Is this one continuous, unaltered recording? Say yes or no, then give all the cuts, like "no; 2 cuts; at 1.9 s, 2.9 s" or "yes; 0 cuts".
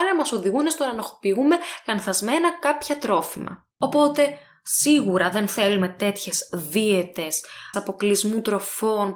no; 2 cuts; at 3.7 s, 7.7 s